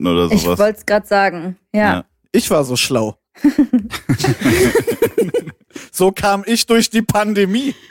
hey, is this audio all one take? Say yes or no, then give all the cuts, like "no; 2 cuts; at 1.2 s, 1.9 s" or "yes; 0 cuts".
yes; 0 cuts